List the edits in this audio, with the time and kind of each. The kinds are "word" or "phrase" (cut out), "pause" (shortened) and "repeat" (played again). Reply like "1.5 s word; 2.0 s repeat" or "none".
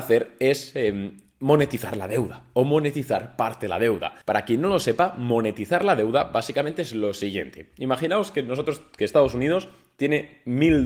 4.2 s pause